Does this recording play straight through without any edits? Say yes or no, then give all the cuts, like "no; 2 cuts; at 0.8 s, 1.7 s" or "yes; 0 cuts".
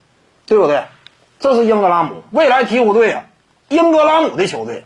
yes; 0 cuts